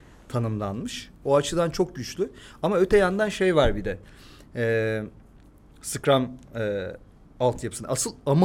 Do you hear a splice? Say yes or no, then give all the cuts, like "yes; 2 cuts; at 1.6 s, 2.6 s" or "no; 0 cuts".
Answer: no; 0 cuts